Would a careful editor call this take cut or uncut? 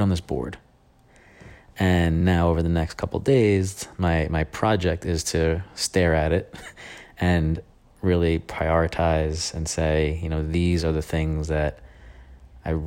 uncut